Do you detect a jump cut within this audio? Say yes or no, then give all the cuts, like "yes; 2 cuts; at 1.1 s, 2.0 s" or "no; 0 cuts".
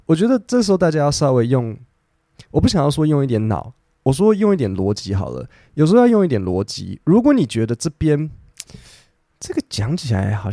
no; 0 cuts